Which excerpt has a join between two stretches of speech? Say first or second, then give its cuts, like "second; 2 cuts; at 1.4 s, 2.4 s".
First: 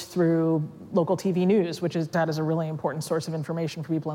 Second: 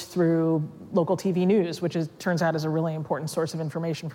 first; 1 cut; at 2.1 s